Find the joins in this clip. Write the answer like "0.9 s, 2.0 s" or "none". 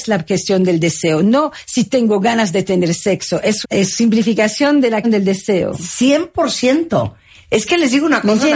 3.6 s, 5.0 s